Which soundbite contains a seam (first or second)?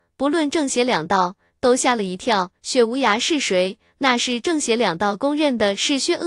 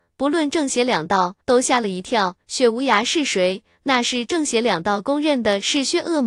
second